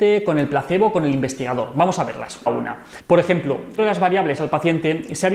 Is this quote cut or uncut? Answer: cut